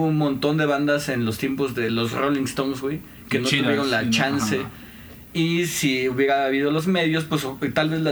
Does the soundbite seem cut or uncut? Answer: uncut